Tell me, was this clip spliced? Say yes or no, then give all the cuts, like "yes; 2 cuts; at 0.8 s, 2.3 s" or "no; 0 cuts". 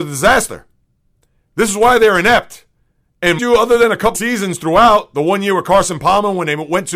yes; 2 cuts; at 3.4 s, 4.1 s